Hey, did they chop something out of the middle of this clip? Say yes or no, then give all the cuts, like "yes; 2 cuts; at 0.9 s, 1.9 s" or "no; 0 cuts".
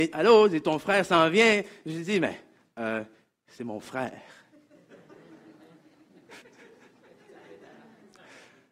no; 0 cuts